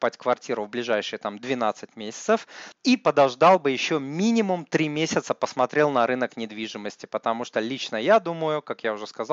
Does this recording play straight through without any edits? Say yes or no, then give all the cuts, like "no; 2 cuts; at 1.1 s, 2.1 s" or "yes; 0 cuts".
no; 1 cut; at 2.7 s